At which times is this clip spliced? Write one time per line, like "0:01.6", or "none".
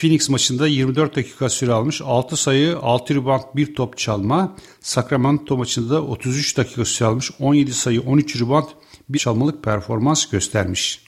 0:09.1